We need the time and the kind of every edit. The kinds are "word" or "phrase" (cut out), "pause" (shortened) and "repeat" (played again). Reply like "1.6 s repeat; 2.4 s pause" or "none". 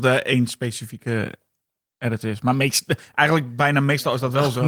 none